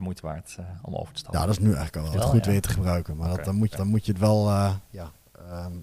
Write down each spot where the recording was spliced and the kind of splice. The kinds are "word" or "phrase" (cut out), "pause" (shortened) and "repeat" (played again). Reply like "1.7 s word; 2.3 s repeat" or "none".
2.1 s word; 3.7 s repeat